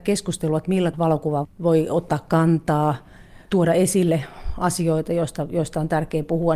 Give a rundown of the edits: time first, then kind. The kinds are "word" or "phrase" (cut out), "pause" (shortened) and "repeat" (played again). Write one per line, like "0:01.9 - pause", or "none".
0:00.9 - word
0:01.4 - word